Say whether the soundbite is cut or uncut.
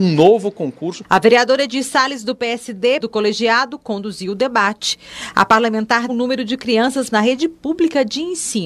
cut